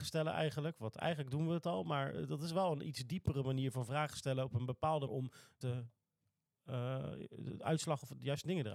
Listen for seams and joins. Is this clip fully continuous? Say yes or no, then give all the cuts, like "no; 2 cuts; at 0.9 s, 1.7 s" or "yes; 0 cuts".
no; 2 cuts; at 5.1 s, 5.6 s